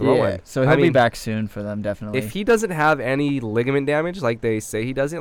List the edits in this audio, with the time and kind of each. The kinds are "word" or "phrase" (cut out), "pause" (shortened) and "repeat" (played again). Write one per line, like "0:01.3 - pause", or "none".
none

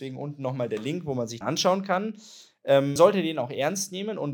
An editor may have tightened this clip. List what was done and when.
0:01.4 - word
0:03.0 - word

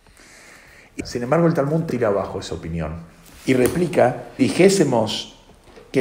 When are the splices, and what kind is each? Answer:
0:01.0 - word
0:01.9 - word
0:04.4 - word

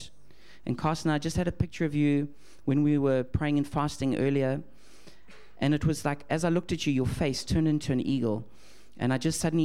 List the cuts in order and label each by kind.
none

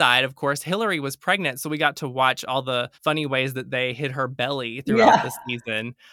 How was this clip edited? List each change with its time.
0:02.9 - pause

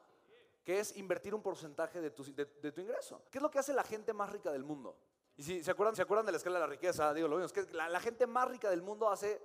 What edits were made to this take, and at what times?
0:03.3 - pause
0:05.1 - pause
0:05.9 - repeat

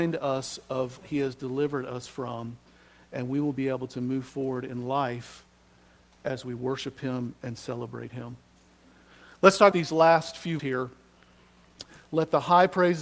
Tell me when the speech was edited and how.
0:01.0 - word
0:09.7 - word
0:10.6 - word

